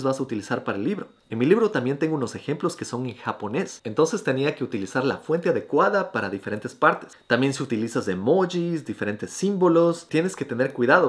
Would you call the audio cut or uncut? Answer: uncut